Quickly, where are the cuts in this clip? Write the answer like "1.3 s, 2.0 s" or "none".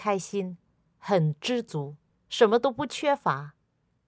none